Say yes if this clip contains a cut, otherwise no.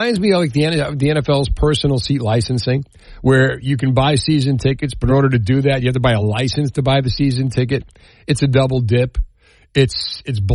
no